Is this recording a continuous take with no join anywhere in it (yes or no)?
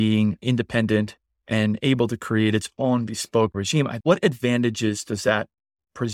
no